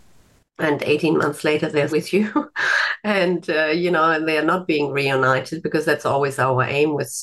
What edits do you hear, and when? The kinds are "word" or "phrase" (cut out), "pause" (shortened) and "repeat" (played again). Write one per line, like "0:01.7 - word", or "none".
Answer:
0:01.9 - word
0:04.3 - word